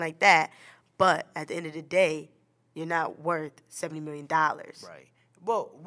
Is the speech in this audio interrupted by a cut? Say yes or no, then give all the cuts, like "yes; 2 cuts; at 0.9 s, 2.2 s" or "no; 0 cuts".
no; 0 cuts